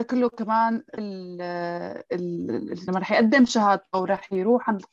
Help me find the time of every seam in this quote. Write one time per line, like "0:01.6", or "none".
0:01.0
0:02.9